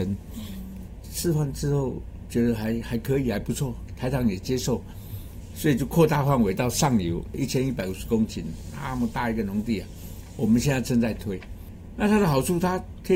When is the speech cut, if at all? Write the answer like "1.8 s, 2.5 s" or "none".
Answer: 1.0 s